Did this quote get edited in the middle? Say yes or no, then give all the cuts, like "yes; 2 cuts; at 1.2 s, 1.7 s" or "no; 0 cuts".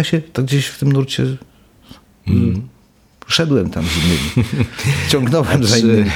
no; 0 cuts